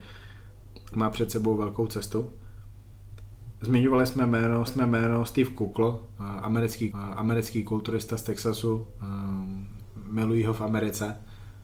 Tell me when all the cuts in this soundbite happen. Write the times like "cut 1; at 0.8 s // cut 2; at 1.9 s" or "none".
cut 1; at 0.9 s // cut 2; at 4.7 s // cut 3; at 6.9 s